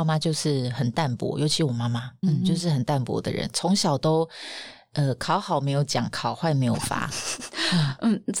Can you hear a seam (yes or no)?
yes